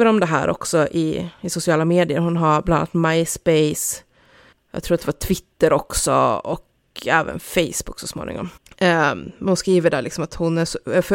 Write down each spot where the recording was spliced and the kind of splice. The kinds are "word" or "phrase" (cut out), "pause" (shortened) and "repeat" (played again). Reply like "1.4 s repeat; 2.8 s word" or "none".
4.5 s pause; 8.6 s pause